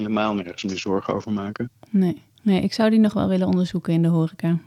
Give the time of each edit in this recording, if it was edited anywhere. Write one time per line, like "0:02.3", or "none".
0:02.3